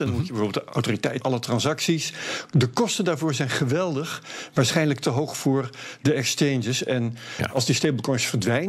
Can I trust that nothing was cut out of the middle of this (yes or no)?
no